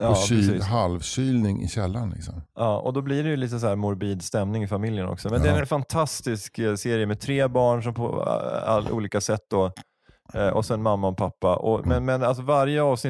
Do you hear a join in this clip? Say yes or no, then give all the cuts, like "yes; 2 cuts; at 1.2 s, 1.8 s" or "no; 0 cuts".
no; 0 cuts